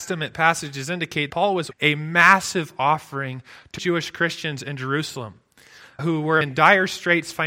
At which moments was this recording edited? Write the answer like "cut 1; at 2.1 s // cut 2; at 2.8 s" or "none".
cut 1; at 1.3 s // cut 2; at 1.7 s // cut 3; at 3.8 s // cut 4; at 6.0 s // cut 5; at 6.4 s